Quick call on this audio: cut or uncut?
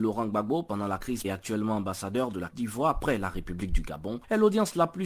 cut